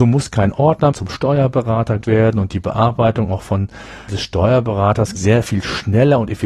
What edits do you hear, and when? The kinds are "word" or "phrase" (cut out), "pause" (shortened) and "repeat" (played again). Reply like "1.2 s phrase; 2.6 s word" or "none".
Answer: 0.9 s word; 2.0 s word; 4.1 s word; 5.1 s word